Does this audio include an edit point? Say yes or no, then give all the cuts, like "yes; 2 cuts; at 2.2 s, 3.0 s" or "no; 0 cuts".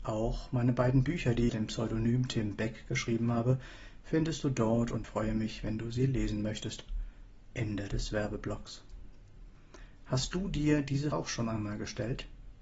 yes; 3 cuts; at 1.5 s, 5.0 s, 11.1 s